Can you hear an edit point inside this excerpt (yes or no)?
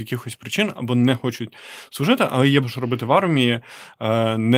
yes